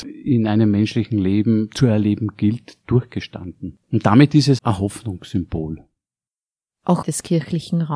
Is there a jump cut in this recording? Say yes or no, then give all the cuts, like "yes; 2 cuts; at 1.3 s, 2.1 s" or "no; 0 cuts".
yes; 3 cuts; at 3.8 s, 4.6 s, 7.0 s